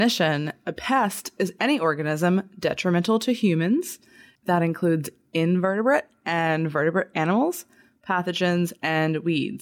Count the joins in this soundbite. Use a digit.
0